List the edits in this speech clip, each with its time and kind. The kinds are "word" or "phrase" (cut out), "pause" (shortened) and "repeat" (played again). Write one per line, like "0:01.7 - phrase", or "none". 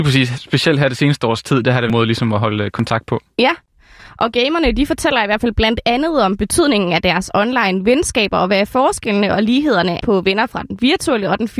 0:01.9 - phrase
0:10.0 - word